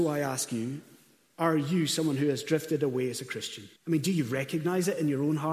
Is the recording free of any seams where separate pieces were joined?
no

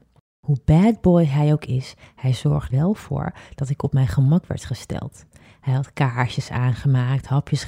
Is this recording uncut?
no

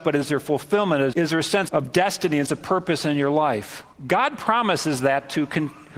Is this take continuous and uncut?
no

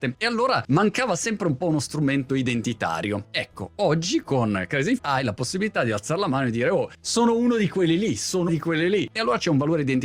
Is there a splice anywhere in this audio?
yes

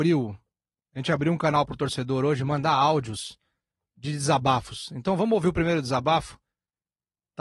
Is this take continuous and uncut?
yes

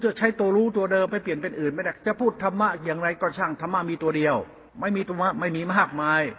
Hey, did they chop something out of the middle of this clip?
yes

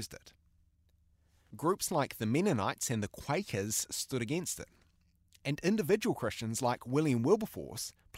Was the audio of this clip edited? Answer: no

